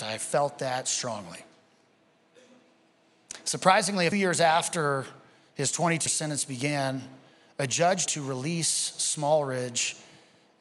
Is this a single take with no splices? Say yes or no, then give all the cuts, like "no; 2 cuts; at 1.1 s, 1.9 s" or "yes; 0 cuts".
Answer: no; 3 cuts; at 4.1 s, 6.1 s, 8.1 s